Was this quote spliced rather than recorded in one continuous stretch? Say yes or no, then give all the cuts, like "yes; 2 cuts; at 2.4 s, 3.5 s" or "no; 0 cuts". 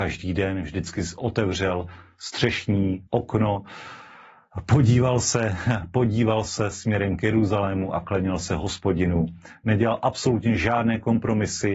yes; 1 cut; at 3.1 s